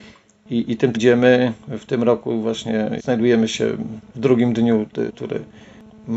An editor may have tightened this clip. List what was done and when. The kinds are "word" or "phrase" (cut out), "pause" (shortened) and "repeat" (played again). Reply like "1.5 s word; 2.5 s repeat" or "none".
0.9 s word; 3.0 s word; 4.1 s pause; 5.1 s word